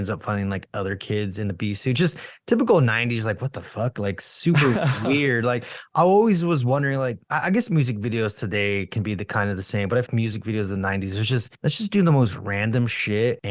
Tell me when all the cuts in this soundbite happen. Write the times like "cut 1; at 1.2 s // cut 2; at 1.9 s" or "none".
cut 1; at 10.1 s